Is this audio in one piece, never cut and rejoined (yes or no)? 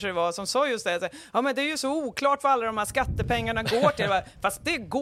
yes